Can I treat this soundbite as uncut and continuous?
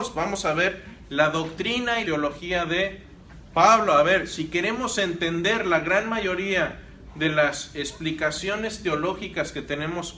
no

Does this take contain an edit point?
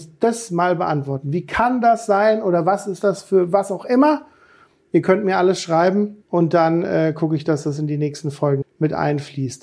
yes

